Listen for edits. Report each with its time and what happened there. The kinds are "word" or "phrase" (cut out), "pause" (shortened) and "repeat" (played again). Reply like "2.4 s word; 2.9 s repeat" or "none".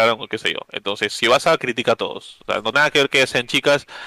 1.6 s word; 2.7 s word